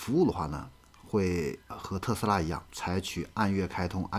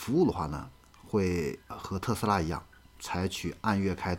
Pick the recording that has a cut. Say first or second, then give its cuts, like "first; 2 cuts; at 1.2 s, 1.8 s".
first; 1 cut; at 2.7 s